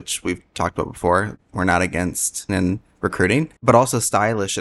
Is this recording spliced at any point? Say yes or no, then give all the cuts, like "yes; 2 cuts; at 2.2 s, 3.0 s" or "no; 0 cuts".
yes; 3 cuts; at 1.4 s, 2.5 s, 3.6 s